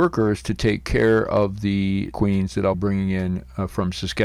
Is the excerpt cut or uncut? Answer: cut